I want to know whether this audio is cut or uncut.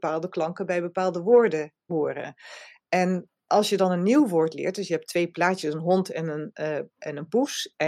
uncut